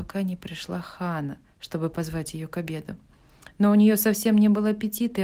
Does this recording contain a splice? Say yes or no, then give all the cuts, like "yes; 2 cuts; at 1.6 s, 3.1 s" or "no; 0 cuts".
yes; 1 cut; at 1.5 s